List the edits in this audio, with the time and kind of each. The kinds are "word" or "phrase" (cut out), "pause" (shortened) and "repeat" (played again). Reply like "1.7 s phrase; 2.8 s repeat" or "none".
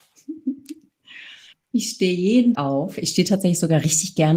1.5 s pause; 2.5 s word